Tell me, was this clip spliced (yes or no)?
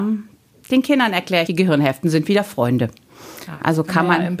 yes